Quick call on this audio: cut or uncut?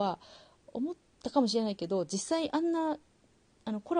uncut